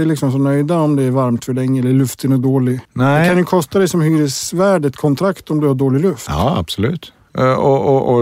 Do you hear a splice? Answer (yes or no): yes